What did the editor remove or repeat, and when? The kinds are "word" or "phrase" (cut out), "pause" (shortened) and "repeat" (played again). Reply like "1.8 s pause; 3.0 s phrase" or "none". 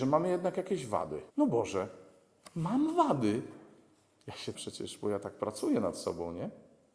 1.3 s pause; 4.5 s phrase